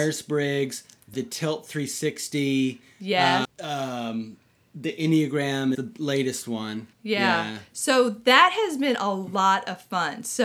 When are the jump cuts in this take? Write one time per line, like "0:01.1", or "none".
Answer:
0:01.1
0:03.4
0:05.7
0:06.9